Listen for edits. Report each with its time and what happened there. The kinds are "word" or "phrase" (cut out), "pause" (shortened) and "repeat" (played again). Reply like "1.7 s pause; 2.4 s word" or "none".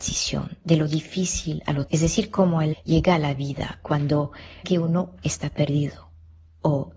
1.9 s word; 2.7 s word; 4.6 s word; 5.2 s word